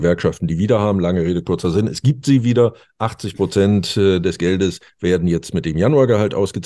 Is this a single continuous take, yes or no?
yes